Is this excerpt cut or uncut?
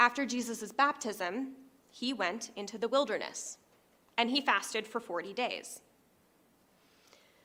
uncut